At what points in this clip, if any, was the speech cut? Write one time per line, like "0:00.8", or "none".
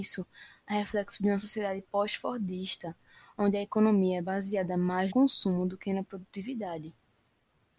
0:05.1